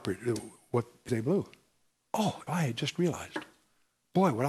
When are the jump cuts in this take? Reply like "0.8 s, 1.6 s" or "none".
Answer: 1.1 s, 2.5 s